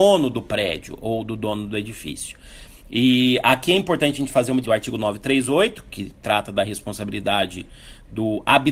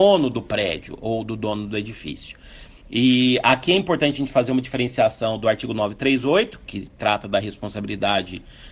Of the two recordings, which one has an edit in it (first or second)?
first